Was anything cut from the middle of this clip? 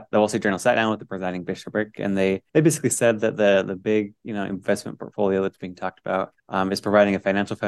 yes; 2 cuts; at 2.5 s, 6.4 s

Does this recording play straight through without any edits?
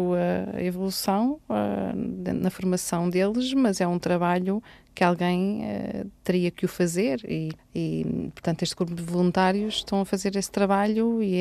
yes; 0 cuts

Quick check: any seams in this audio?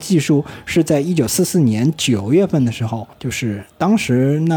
yes; 1 cut; at 3.1 s

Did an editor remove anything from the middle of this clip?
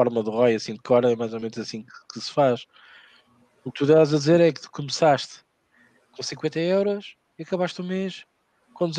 no; 0 cuts

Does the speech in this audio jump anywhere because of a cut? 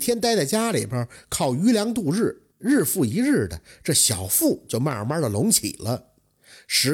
yes; 1 cut; at 2.5 s

